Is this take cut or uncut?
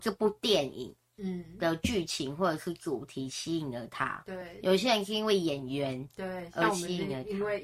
uncut